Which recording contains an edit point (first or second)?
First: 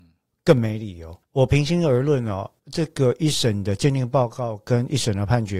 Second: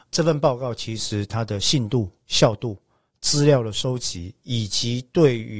first